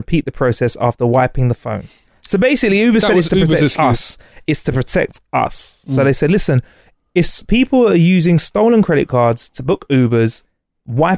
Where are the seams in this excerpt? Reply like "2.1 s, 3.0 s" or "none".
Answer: none